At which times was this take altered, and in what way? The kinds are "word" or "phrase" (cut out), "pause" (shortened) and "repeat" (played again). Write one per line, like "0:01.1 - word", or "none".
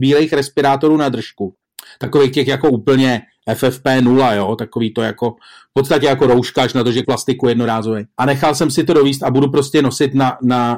0:07.0 - word
0:08.1 - pause